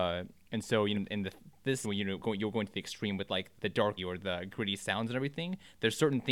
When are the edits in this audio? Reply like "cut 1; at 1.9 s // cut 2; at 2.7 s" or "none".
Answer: cut 1; at 0.9 s // cut 2; at 1.8 s // cut 3; at 2.2 s // cut 4; at 3.6 s // cut 5; at 4.0 s

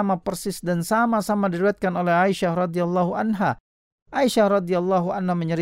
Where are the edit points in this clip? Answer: none

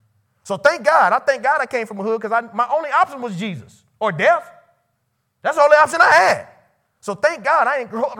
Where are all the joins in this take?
none

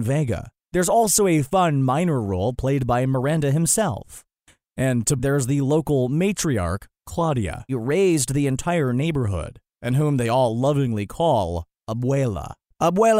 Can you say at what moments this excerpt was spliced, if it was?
cut 1; at 5.2 s // cut 2; at 7.7 s

